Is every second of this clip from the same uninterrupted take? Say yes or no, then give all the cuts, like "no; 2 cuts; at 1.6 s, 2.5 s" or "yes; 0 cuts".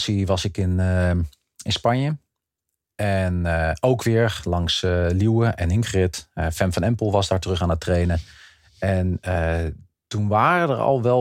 yes; 0 cuts